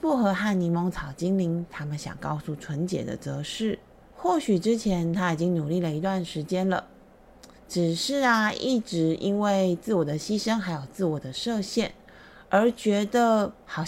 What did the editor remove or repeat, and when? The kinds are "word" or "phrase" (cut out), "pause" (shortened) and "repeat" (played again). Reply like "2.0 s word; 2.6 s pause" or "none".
4.1 s pause; 7.6 s pause; 12.4 s pause

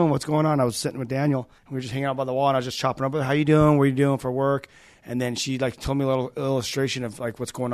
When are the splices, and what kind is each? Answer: 1.6 s pause

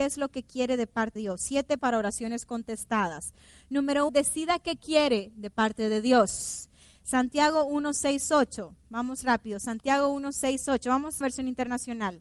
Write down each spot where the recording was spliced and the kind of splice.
1.2 s word; 1.8 s word; 4.1 s word; 11.2 s word

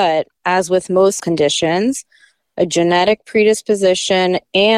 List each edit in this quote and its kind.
1.2 s word

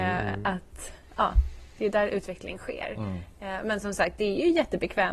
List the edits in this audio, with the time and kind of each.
none

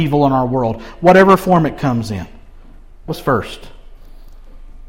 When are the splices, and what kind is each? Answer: 3.1 s word

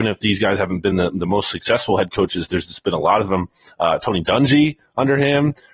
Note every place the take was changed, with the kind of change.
none

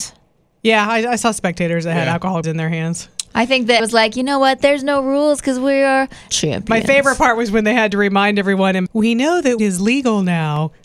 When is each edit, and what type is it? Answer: 2.4 s word; 3.8 s word; 6.3 s word; 8.9 s word; 9.6 s word

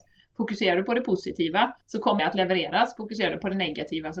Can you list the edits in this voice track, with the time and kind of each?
1.8 s pause; 2.2 s word

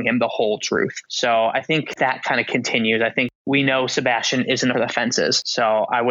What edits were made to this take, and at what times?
2.0 s word; 4.7 s phrase

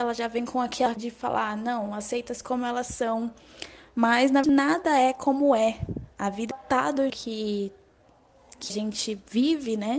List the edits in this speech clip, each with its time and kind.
1.0 s word; 2.4 s word; 4.4 s word; 6.5 s word; 7.1 s word; 8.7 s word

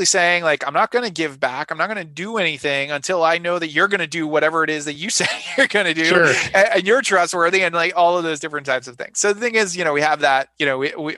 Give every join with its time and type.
none

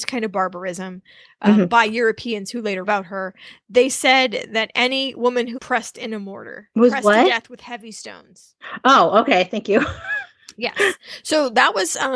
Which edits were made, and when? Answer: 2.8 s word; 5.5 s phrase; 6.7 s word

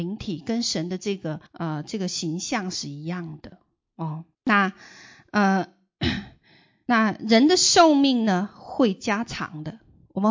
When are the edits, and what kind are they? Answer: 1.5 s pause; 4.3 s pause

